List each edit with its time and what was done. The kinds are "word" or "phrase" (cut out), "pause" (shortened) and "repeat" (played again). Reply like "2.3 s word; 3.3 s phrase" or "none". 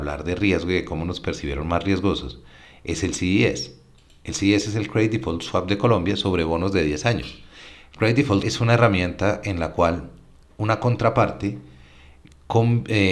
8.4 s word